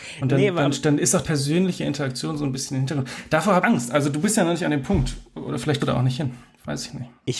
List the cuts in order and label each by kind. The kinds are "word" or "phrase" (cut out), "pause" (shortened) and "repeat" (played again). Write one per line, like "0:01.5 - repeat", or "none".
0:01.2 - word
0:03.6 - word
0:05.8 - word

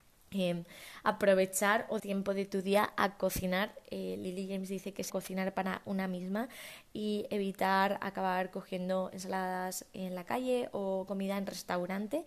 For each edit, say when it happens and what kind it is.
0:02.0 - word
0:05.1 - phrase
0:11.1 - word

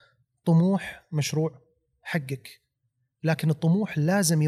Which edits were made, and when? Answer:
none

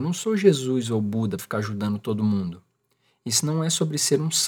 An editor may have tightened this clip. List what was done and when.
0:01.4 - word

